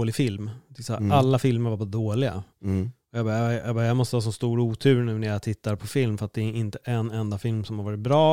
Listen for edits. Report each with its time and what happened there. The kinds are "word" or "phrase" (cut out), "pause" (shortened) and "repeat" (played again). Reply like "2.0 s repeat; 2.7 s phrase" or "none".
none